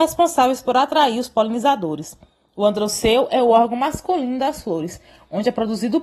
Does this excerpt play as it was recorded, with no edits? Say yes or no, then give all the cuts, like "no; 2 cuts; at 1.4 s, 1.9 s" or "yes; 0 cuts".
yes; 0 cuts